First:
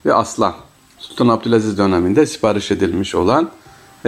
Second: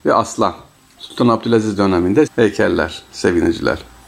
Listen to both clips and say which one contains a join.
second; 1 cut; at 2.3 s

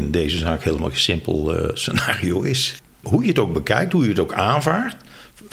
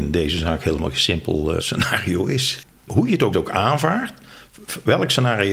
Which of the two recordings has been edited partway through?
second; 2 cuts; at 1.6 s, 3.3 s

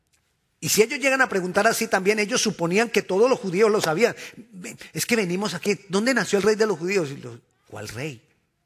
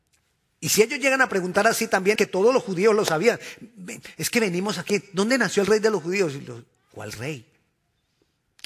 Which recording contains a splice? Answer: second; 1 cut; at 2.2 s

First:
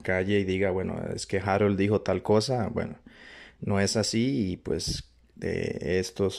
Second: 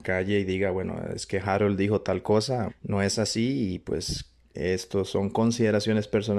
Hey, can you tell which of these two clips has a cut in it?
second; 2 cuts; at 2.7 s, 4.5 s

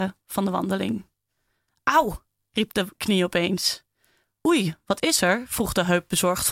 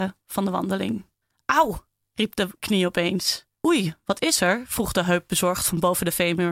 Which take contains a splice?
second; 2 cuts; at 1.2 s, 3.5 s

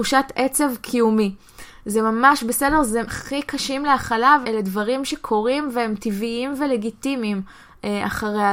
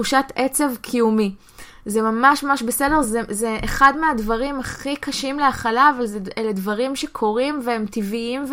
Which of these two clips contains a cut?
first; 3 cuts; at 2.4 s, 3.1 s, 4.4 s

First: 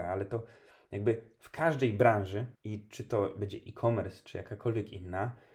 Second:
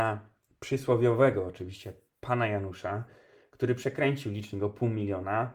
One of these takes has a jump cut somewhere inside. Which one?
first; 1 cut; at 2.6 s

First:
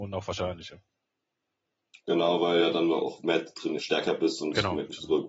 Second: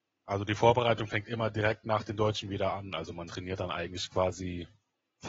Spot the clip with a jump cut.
first; 1 cut; at 3.8 s

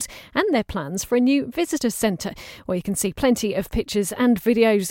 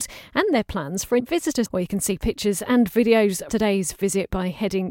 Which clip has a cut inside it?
second; 4 cuts; at 1.2 s, 1.7 s, 2.2 s, 3.5 s

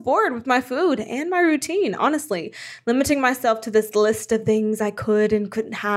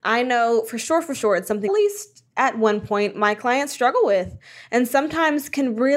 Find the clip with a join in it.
second; 1 cut; at 1.7 s

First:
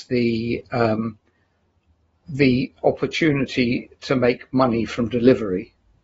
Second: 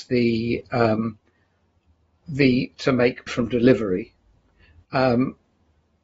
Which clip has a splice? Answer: second; 2 cuts; at 2.7 s, 3.3 s

